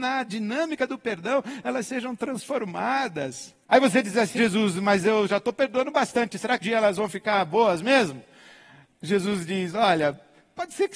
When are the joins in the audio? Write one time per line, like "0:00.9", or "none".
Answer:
0:03.6
0:04.4
0:06.6